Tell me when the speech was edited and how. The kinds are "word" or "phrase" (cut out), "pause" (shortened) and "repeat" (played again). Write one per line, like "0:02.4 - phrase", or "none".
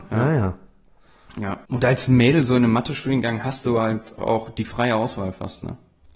0:01.6 - pause
0:04.2 - word